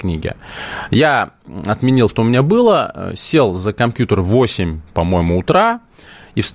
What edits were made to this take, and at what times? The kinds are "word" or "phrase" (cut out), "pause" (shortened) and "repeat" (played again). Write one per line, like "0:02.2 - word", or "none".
0:02.1 - word